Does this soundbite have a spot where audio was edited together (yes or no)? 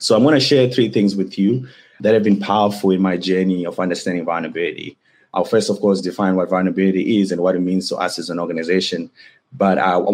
no